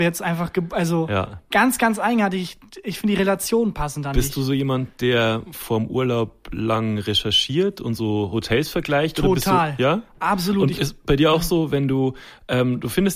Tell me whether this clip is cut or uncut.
uncut